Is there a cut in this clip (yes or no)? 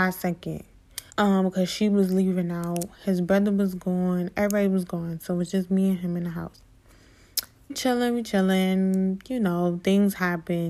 yes